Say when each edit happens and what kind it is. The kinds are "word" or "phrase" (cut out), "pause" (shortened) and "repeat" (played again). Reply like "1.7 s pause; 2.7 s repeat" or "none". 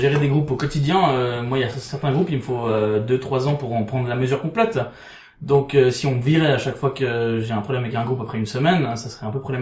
none